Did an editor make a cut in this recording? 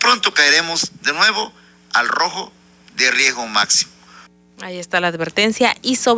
no; 0 cuts

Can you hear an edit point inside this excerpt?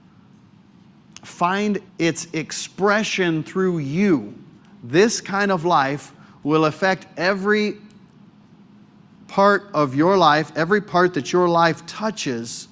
yes; 2 cuts; at 1.9 s, 4.6 s

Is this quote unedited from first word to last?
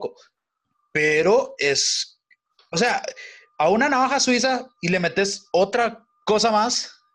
yes; 0 cuts

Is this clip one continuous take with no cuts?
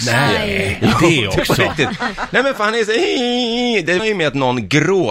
no; 1 cut; at 4.0 s

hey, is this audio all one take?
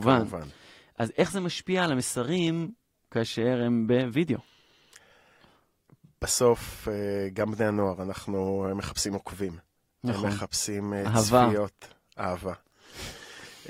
yes; 0 cuts

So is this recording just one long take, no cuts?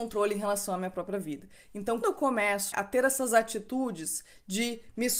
no; 2 cuts; at 2.0 s, 2.7 s

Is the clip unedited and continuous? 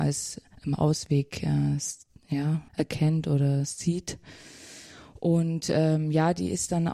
no; 1 cut; at 2.7 s

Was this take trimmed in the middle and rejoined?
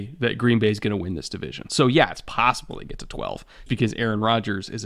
yes; 1 cut; at 3.7 s

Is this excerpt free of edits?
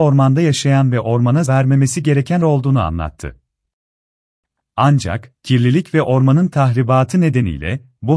no; 2 cuts; at 1.5 s, 2.4 s

